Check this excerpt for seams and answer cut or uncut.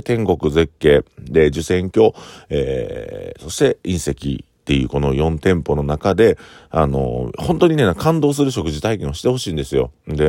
uncut